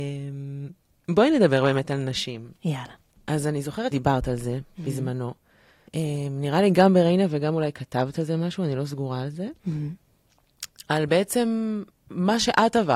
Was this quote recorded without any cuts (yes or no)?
no